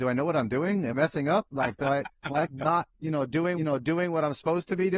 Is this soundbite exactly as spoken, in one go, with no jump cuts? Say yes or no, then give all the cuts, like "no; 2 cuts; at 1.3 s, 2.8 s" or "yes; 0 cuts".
no; 4 cuts; at 0.9 s, 2.5 s, 2.9 s, 3.6 s